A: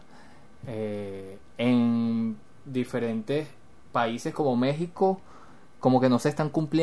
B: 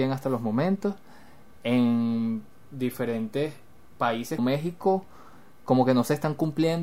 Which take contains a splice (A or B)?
B